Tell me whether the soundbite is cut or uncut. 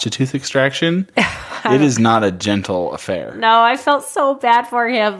uncut